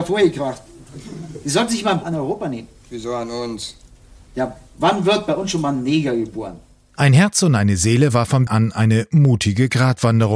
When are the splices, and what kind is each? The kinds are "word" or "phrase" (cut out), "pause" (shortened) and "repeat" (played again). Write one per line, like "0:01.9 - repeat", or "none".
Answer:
0:02.0 - word
0:08.5 - word